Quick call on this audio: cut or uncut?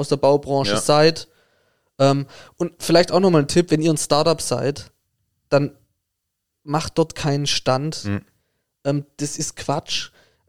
uncut